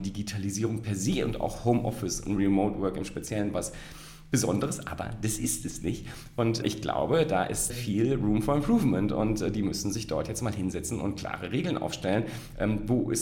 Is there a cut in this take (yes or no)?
yes